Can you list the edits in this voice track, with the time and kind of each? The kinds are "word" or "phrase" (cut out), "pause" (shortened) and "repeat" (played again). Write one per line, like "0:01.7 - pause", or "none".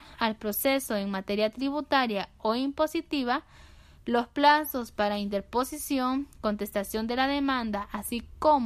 none